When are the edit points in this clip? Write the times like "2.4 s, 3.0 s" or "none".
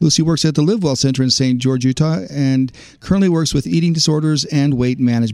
none